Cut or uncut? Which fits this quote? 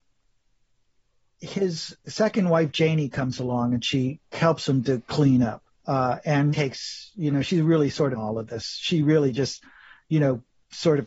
cut